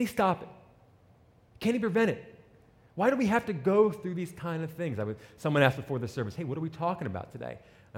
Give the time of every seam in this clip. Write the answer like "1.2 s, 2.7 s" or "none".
none